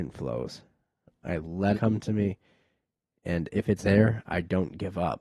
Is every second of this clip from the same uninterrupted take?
no; 2 cuts; at 1.7 s, 3.8 s

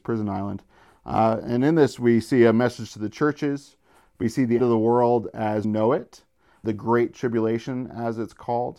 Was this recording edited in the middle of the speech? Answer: yes; 3 cuts; at 4.6 s, 5.6 s, 6.6 s

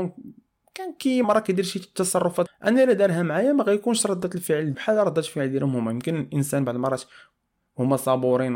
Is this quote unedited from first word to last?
no; 3 cuts; at 1.2 s, 2.5 s, 4.7 s

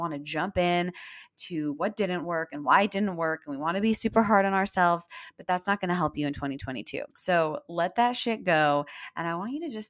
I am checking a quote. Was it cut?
yes; 1 cut; at 7.1 s

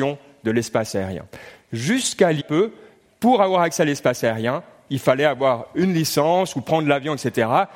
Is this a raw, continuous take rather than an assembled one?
no; 1 cut; at 2.4 s

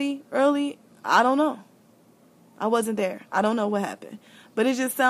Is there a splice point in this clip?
no; 0 cuts

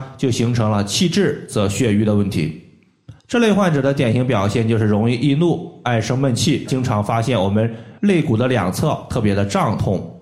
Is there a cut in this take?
yes; 3 cuts; at 3.2 s, 6.7 s, 8.0 s

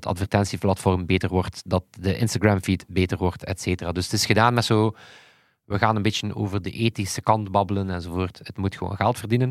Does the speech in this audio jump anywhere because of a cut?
no; 0 cuts

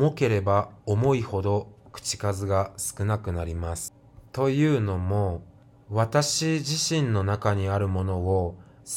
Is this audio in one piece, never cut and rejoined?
no; 2 cuts; at 4.3 s, 5.6 s

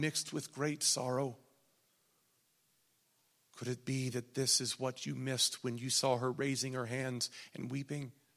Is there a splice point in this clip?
no; 0 cuts

